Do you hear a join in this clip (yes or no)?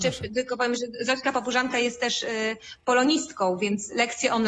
no